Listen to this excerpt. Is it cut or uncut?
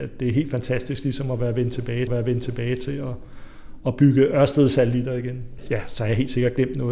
cut